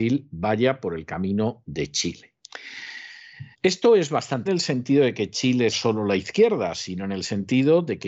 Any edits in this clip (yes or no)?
yes